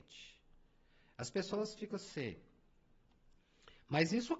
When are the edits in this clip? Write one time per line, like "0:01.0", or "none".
none